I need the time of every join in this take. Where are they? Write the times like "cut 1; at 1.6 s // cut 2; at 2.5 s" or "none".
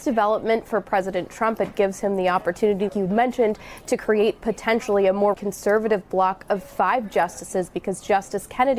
cut 1; at 2.9 s // cut 2; at 5.3 s